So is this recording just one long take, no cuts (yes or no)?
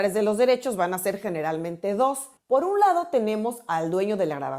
no